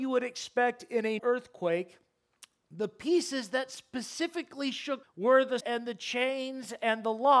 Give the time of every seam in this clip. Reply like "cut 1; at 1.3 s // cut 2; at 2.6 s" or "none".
cut 1; at 1.2 s // cut 2; at 5.0 s // cut 3; at 5.6 s